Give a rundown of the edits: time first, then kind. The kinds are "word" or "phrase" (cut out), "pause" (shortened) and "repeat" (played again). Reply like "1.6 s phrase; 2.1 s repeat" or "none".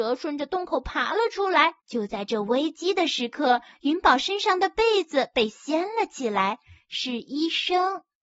1.8 s pause